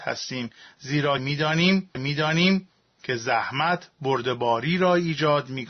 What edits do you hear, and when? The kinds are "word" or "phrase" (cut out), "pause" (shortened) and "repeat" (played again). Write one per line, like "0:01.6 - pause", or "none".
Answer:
0:01.9 - repeat